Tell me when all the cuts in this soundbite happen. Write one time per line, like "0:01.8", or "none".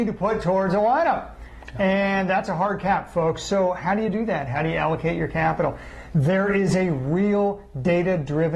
none